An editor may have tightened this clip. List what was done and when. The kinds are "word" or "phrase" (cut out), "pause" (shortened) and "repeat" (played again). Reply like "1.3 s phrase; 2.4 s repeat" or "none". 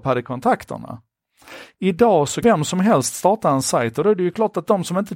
2.4 s word